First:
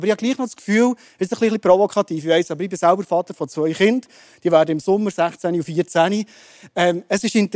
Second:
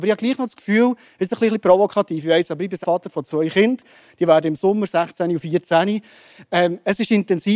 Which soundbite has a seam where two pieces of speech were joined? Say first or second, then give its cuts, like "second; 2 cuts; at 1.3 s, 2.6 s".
second; 1 cut; at 2.8 s